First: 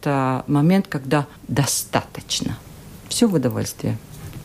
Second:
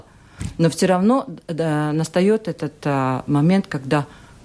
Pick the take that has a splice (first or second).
first